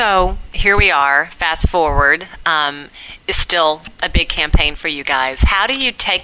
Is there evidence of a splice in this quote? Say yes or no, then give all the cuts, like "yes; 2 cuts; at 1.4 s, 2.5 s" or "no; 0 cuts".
no; 0 cuts